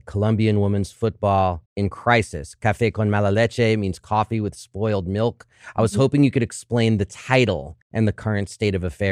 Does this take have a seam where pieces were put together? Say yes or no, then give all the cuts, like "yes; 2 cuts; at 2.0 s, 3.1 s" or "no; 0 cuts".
yes; 2 cuts; at 1.7 s, 7.8 s